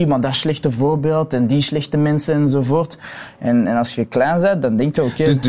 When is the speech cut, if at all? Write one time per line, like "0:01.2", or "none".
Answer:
none